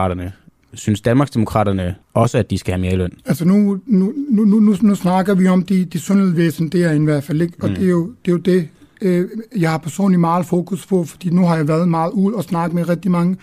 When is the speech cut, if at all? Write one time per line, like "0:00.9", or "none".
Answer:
0:02.0
0:03.2